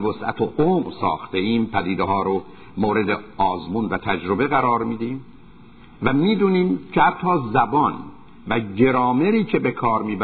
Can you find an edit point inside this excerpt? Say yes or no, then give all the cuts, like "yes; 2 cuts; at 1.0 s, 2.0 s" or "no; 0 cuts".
no; 0 cuts